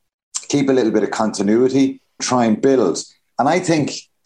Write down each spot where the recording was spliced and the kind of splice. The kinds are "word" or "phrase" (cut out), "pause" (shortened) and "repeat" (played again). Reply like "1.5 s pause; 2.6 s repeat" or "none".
2.2 s word